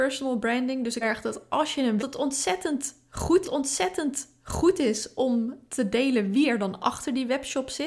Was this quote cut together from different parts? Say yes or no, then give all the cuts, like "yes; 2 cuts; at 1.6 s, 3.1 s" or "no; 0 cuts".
yes; 3 cuts; at 1.0 s, 2.0 s, 3.4 s